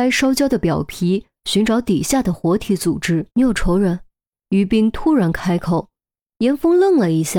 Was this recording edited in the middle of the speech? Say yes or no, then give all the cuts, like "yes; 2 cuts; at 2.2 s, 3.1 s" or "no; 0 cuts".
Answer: yes; 2 cuts; at 3.3 s, 4.3 s